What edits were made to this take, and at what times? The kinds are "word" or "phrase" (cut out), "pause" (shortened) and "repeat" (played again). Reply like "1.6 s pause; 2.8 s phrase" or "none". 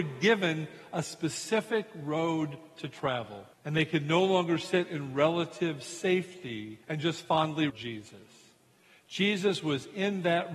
3.5 s pause; 6.8 s pause; 7.7 s word